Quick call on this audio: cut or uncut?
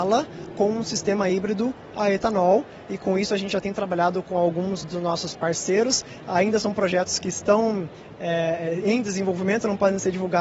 uncut